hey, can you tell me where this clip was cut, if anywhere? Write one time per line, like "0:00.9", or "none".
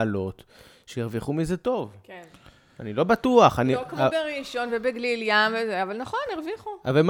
none